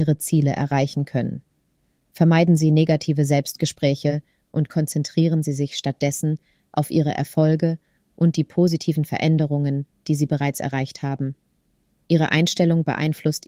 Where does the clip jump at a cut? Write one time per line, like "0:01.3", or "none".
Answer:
none